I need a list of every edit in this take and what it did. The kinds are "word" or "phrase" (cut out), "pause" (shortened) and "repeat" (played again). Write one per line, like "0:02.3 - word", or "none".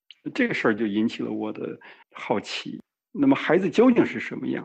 0:02.0 - pause